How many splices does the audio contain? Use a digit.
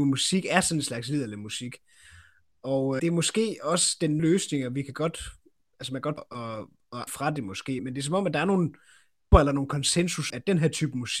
7